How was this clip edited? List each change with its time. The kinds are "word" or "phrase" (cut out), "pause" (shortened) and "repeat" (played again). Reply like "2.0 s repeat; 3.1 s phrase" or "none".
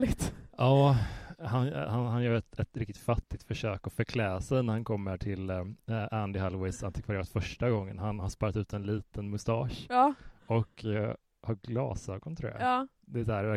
none